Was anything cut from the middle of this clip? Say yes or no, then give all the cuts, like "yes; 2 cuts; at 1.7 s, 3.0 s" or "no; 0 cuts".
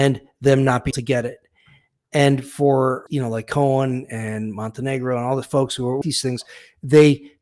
yes; 3 cuts; at 0.9 s, 3.1 s, 6.0 s